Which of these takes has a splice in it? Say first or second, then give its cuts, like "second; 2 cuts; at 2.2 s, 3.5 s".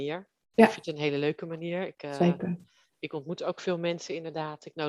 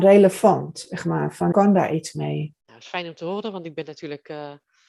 second; 2 cuts; at 1.5 s, 2.6 s